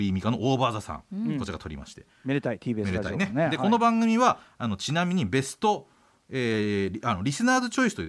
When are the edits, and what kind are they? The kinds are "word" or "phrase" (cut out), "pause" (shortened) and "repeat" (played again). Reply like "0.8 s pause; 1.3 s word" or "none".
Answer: none